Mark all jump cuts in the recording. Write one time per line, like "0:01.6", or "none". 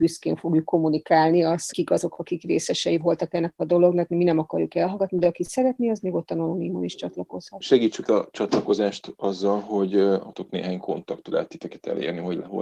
0:01.7
0:04.1
0:08.0
0:11.3